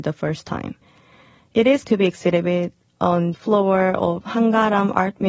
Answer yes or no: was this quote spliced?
yes